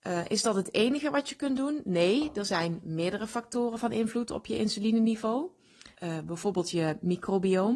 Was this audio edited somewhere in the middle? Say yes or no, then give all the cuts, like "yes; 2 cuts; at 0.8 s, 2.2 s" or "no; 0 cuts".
yes; 1 cut; at 5.9 s